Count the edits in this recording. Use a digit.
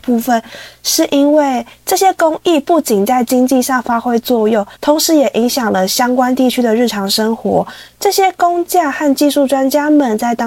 1